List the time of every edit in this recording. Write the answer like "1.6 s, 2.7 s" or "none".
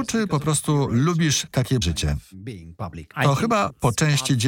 1.8 s, 3.1 s